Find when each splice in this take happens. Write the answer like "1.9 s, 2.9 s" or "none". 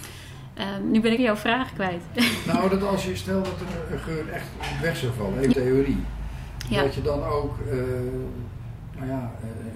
1.2 s, 5.5 s